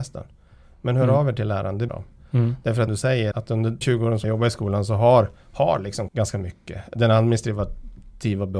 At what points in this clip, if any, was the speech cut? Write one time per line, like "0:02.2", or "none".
0:01.9
0:02.9
0:03.3
0:03.8
0:04.2
0:05.4
0:06.1